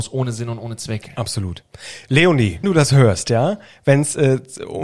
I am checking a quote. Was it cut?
yes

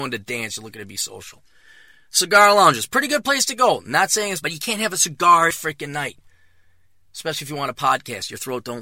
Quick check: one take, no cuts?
no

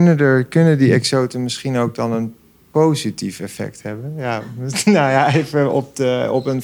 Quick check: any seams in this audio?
no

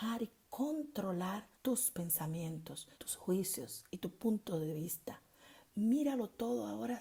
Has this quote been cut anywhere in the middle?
yes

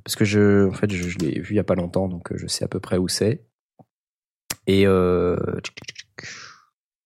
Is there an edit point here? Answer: no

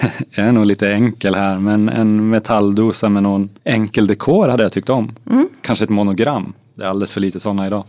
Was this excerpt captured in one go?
no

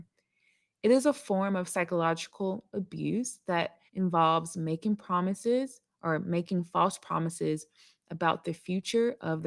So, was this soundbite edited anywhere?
yes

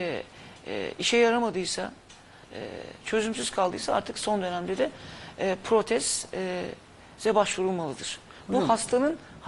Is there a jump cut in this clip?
no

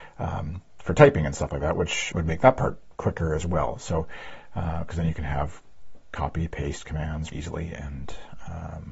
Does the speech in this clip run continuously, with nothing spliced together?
no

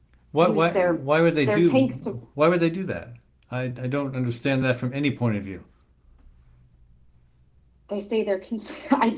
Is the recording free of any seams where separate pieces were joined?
yes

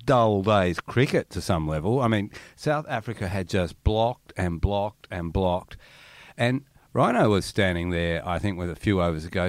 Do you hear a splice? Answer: no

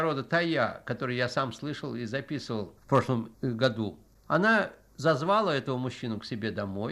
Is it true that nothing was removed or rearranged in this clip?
no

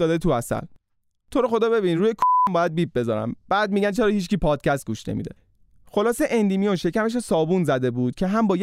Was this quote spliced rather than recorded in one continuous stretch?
no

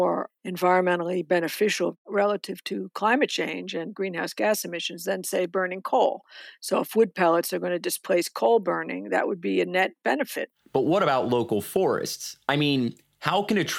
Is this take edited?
no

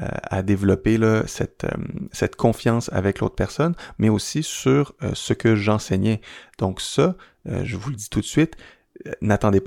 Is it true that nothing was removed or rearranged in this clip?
yes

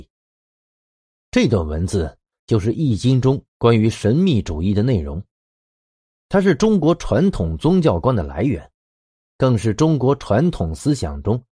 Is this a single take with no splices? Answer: yes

